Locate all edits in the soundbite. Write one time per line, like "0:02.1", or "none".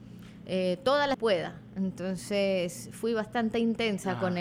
0:01.1